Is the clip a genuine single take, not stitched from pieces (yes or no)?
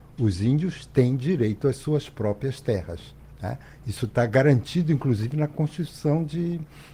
yes